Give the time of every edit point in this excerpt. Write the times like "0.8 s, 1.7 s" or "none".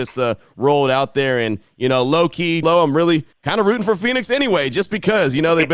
2.6 s